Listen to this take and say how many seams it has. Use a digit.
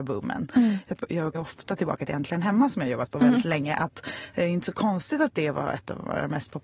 2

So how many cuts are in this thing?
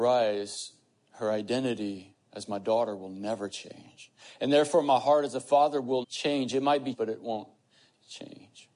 2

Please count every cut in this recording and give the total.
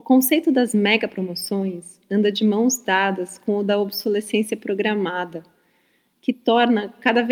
0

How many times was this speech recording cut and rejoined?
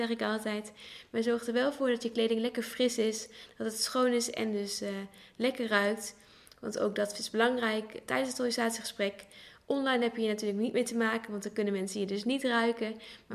0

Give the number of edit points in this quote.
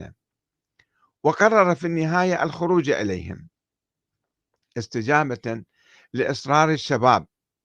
0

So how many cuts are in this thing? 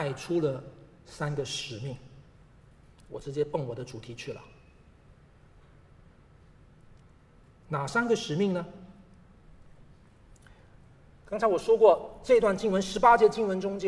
1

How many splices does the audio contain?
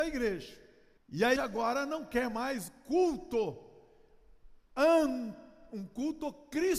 4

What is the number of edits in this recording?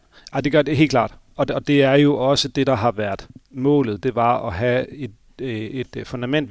0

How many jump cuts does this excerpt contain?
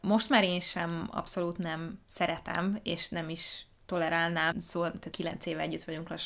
3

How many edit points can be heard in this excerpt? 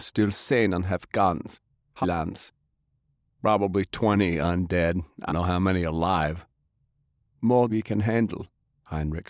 3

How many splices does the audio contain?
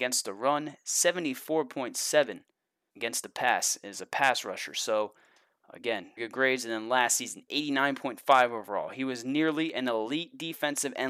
1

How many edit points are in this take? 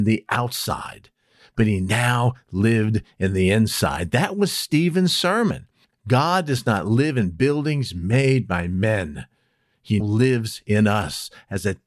1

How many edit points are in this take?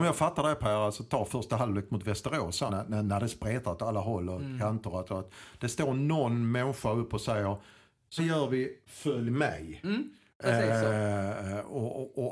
2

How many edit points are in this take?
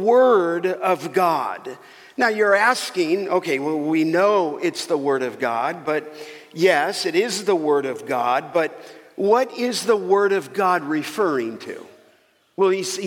0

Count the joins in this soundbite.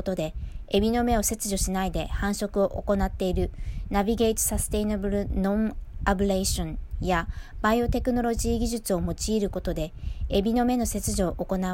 1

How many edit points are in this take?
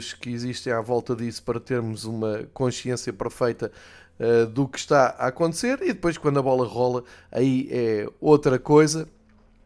0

